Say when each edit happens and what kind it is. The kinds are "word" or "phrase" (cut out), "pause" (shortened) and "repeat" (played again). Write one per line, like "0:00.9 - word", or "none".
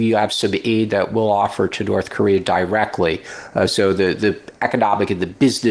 none